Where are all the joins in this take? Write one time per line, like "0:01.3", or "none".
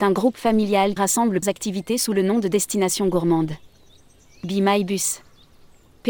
0:01.0
0:01.4